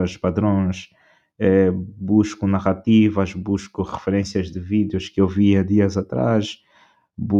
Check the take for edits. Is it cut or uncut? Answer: uncut